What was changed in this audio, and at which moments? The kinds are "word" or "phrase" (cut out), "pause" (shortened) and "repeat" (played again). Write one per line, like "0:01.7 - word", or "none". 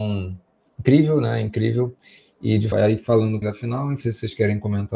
0:02.7 - word
0:03.4 - word
0:04.0 - word